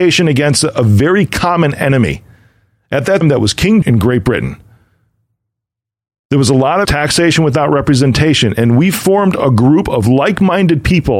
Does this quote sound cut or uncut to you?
cut